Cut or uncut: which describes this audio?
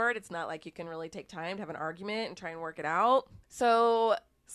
cut